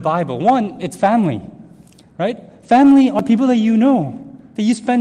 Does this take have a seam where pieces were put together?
no; 0 cuts

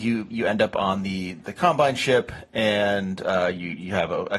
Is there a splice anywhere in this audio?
no; 0 cuts

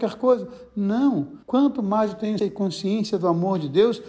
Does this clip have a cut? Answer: yes; 2 cuts; at 1.4 s, 2.4 s

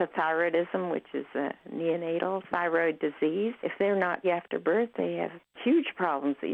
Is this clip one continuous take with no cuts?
no; 2 cuts; at 3.6 s, 4.2 s

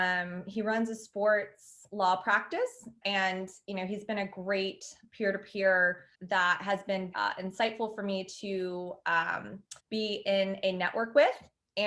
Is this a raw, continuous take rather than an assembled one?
no; 4 cuts; at 3.0 s, 6.1 s, 7.1 s, 9.8 s

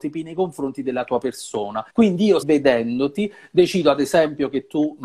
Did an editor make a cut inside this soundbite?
yes; 2 cuts; at 1.9 s, 2.4 s

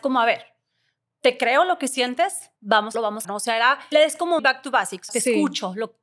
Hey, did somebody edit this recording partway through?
yes; 6 cuts; at 2.6 s, 2.9 s, 3.2 s, 3.9 s, 4.4 s, 5.1 s

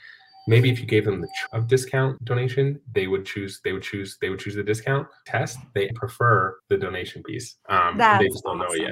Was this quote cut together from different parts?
yes; 6 cuts; at 1.5 s, 2.2 s, 3.8 s, 5.3 s, 5.9 s, 6.6 s

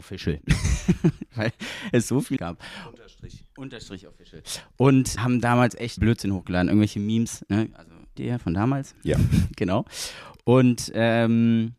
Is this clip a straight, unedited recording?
no; 4 cuts; at 2.4 s, 5.2 s, 6.0 s, 8.2 s

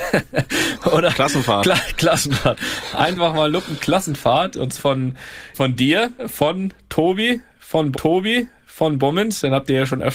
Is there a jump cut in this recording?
yes; 4 cuts; at 4.8 s, 5.5 s, 6.2 s, 7.9 s

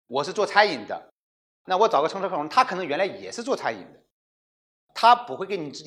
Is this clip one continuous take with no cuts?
yes; 0 cuts

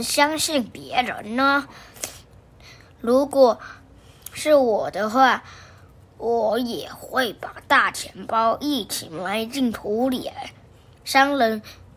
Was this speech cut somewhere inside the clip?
no; 0 cuts

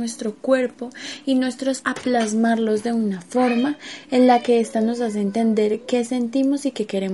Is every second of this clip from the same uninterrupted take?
no; 1 cut; at 1.8 s

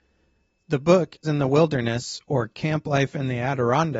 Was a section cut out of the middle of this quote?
yes; 1 cut; at 1.2 s

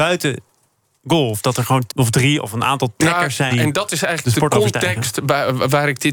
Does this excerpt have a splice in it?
yes; 2 cuts; at 1.9 s, 3.5 s

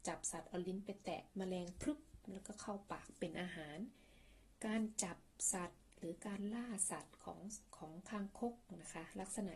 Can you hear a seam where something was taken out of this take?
yes; 2 cuts; at 1.3 s, 7.7 s

